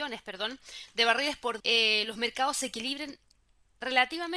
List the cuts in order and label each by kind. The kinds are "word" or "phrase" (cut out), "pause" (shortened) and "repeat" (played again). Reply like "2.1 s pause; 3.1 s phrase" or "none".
1.6 s phrase